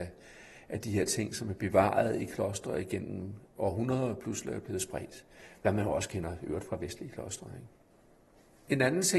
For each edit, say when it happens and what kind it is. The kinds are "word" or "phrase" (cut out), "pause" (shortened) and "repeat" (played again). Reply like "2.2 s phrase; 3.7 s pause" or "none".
none